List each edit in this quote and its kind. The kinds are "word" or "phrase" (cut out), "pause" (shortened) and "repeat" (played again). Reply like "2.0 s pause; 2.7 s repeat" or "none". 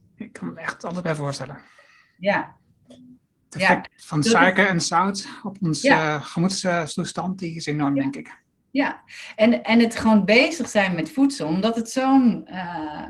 none